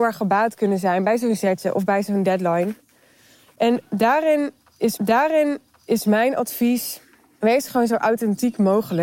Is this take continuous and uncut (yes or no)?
no